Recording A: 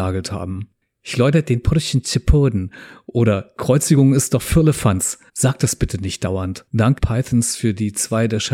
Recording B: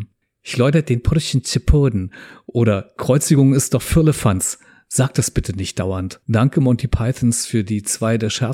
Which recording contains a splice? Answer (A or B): A